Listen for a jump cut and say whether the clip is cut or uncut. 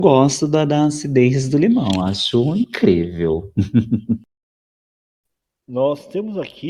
uncut